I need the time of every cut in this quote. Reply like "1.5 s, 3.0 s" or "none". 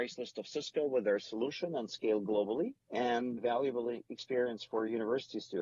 3.4 s